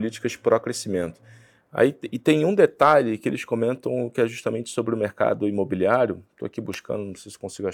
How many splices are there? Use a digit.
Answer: 0